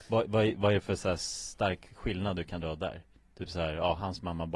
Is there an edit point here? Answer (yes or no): no